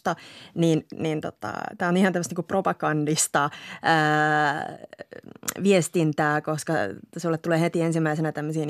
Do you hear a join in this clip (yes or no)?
no